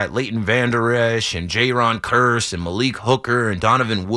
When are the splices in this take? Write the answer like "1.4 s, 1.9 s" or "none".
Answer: none